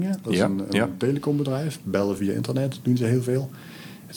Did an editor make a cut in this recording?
no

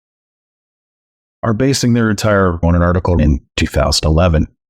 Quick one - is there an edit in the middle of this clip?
yes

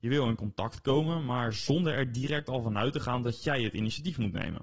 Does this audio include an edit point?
no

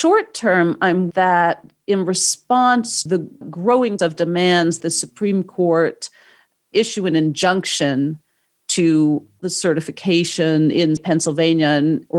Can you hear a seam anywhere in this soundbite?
yes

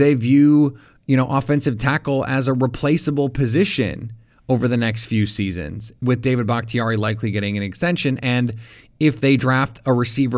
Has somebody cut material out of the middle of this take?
no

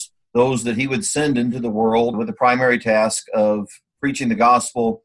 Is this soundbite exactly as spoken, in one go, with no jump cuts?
no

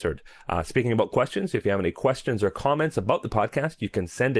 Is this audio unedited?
yes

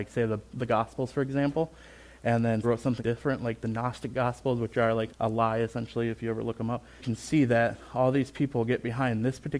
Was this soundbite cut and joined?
yes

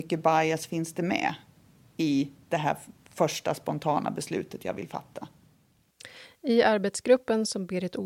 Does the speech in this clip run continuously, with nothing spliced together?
yes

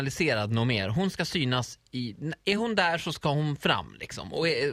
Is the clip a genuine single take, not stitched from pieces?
yes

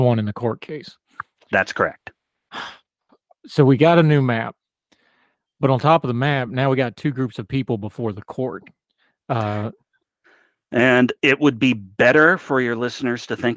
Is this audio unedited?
yes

